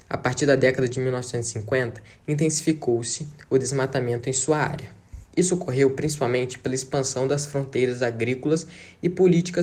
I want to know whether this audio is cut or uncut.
cut